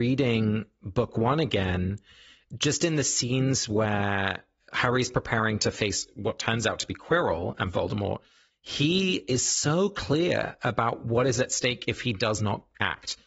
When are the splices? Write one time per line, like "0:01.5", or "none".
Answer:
none